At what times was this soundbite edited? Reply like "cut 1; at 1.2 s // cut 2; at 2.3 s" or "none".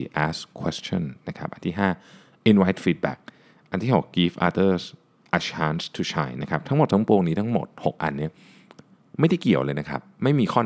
none